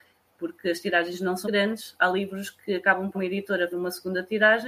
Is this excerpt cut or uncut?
cut